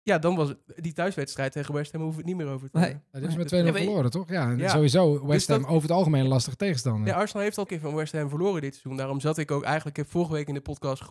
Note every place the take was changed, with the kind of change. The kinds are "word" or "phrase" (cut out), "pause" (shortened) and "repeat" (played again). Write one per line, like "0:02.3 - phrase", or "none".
0:07.7 - word